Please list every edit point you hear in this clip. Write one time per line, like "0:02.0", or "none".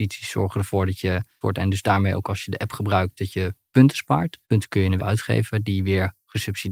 0:01.4
0:04.4
0:05.0